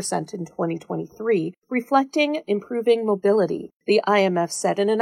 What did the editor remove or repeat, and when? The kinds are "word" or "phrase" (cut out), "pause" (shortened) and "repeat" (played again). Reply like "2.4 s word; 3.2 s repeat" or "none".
1.6 s pause; 3.8 s pause